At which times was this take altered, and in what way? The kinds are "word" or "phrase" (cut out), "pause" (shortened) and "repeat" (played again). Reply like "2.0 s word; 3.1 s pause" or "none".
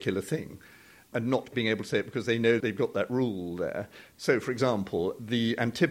1.5 s word